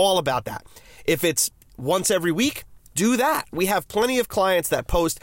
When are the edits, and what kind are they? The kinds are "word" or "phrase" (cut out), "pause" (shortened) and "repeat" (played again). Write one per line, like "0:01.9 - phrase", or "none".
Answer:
none